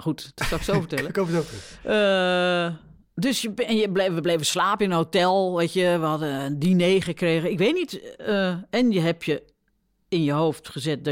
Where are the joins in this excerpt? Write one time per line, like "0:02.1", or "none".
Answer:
none